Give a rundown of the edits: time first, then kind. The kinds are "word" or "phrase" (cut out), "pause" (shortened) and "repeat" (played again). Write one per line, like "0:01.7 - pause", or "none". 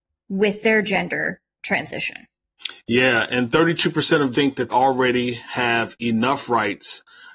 0:04.3 - word
0:04.7 - word